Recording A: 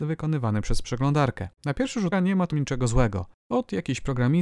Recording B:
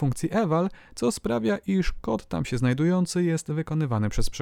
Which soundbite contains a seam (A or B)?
A